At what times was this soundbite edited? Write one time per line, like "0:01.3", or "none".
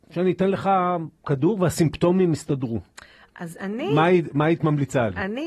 0:01.2